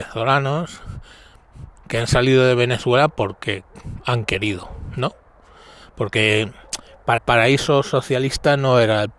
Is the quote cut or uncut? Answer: cut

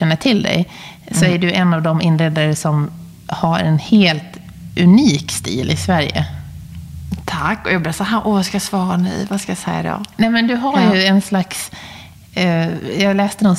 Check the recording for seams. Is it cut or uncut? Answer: uncut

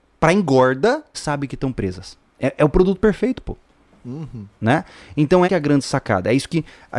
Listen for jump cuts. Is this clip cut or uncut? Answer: cut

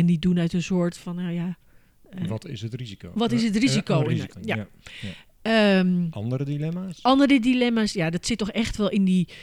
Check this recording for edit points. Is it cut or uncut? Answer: cut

